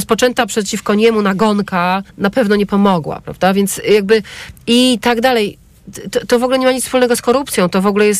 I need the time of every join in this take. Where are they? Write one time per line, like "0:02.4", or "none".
0:02.1